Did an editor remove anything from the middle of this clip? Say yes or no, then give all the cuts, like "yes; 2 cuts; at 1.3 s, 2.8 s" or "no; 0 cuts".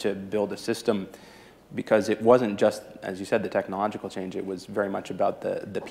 no; 0 cuts